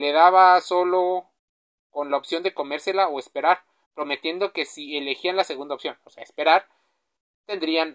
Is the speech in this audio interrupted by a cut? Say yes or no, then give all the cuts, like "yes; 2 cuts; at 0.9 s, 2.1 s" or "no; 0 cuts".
no; 0 cuts